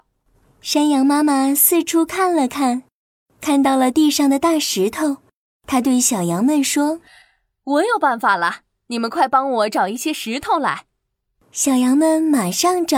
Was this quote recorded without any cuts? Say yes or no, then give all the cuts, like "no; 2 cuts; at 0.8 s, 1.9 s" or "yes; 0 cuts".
yes; 0 cuts